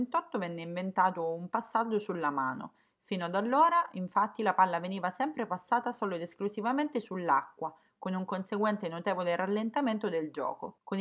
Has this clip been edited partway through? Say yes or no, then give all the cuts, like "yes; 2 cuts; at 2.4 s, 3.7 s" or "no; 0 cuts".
no; 0 cuts